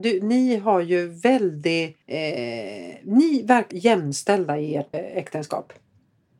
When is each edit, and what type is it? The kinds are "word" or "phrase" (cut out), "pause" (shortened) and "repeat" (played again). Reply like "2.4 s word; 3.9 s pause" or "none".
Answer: 2.0 s pause; 3.7 s word; 4.9 s word